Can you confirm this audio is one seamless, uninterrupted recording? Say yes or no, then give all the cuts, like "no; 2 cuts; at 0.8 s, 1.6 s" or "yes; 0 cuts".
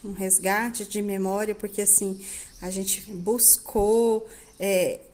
no; 1 cut; at 3.1 s